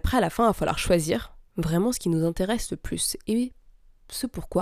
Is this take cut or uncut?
cut